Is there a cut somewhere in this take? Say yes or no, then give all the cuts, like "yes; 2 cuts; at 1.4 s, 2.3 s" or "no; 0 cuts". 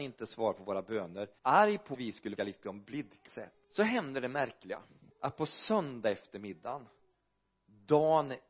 yes; 6 cuts; at 1.4 s, 1.9 s, 2.4 s, 3.3 s, 3.6 s, 5.1 s